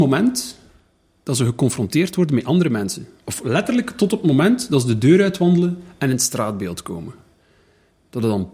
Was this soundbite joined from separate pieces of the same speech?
no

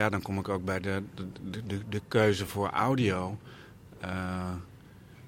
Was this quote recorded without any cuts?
yes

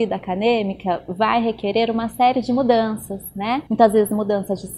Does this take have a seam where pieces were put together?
yes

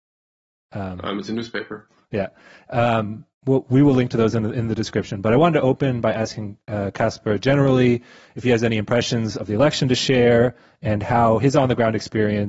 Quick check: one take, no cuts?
yes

